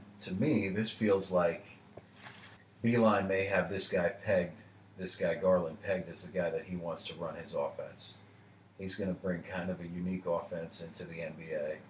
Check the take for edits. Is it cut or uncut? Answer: cut